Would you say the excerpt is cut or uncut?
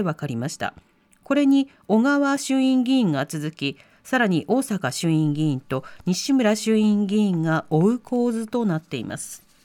uncut